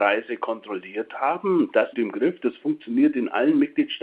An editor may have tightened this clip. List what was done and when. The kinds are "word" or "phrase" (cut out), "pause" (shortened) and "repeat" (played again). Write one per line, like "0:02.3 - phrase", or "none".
0:01.9 - phrase